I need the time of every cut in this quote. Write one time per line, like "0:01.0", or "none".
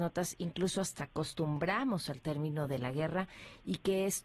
0:01.0